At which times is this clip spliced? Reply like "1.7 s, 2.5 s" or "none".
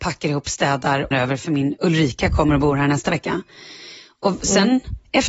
1.1 s